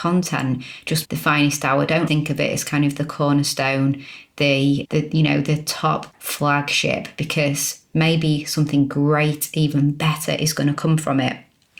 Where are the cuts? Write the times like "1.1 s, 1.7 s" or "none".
1.0 s, 2.1 s, 4.8 s